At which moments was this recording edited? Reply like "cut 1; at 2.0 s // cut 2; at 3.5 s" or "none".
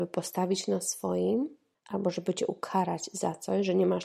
none